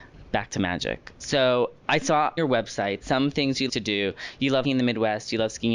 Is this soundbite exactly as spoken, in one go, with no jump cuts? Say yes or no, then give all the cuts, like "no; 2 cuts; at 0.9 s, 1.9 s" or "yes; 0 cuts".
no; 5 cuts; at 1.8 s, 2.4 s, 3.0 s, 3.7 s, 4.6 s